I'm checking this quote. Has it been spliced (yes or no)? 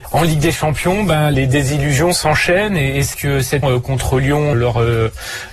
yes